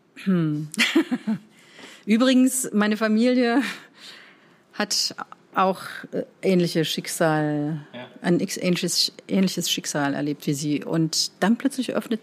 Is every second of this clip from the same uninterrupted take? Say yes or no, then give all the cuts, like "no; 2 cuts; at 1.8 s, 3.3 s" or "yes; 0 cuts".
yes; 0 cuts